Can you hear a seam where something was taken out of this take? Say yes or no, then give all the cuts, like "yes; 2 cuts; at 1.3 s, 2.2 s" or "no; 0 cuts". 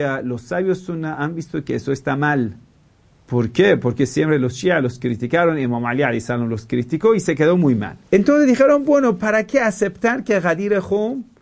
yes; 2 cuts; at 3.0 s, 8.1 s